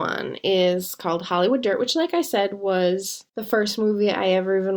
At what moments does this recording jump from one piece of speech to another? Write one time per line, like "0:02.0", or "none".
0:03.3